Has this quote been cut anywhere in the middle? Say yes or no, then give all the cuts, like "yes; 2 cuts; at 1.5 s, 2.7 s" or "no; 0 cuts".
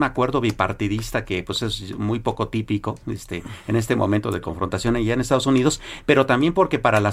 no; 0 cuts